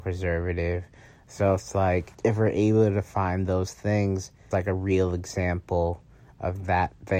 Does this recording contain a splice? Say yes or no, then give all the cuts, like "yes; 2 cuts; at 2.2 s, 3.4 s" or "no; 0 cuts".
yes; 2 cuts; at 2.1 s, 4.5 s